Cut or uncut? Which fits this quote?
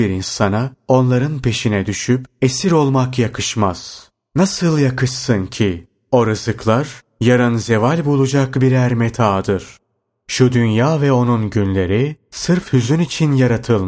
uncut